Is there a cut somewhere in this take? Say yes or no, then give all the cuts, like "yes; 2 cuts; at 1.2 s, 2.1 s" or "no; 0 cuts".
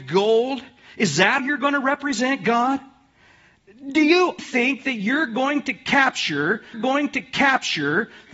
yes; 3 cuts; at 1.4 s, 4.4 s, 6.7 s